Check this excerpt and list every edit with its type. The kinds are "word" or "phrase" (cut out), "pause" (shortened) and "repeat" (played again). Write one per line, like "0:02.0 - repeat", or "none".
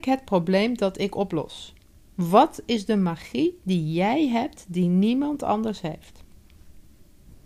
none